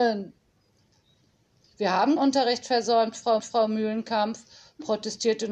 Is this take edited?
yes; 2 cuts; at 2.2 s, 3.4 s

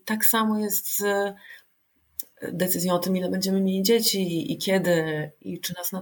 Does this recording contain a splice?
no; 0 cuts

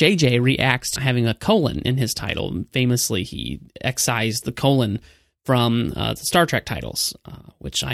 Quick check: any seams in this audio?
yes; 1 cut; at 1.0 s

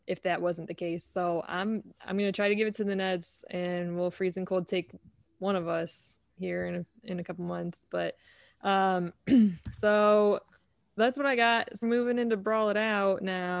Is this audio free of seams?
no; 1 cut; at 11.8 s

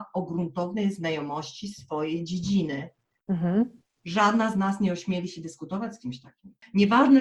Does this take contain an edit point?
no; 0 cuts

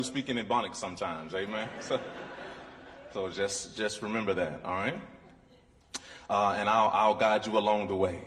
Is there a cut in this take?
no; 0 cuts

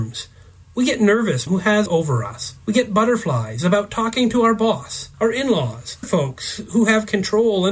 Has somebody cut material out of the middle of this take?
yes; 5 cuts; at 1.5 s, 1.9 s, 2.6 s, 5.1 s, 6.0 s

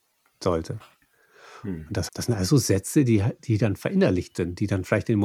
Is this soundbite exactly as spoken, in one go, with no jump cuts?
no; 1 cut; at 2.1 s

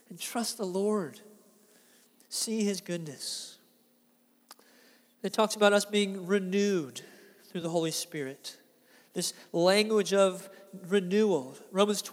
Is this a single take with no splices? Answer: yes; 0 cuts

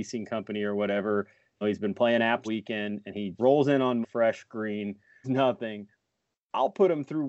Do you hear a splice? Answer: yes; 5 cuts; at 1.6 s, 2.4 s, 3.4 s, 4.0 s, 5.2 s

